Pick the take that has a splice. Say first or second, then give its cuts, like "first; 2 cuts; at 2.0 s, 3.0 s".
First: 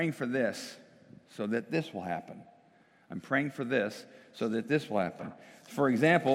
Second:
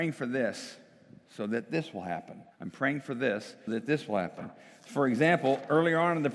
second; 2 cuts; at 2.5 s, 3.7 s